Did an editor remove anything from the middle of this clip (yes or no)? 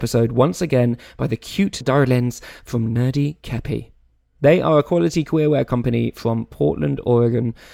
yes